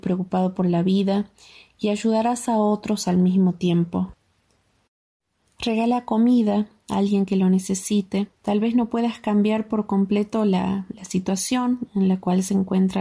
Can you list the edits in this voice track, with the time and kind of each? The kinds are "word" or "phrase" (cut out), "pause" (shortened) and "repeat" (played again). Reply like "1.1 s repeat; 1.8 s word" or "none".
8.4 s pause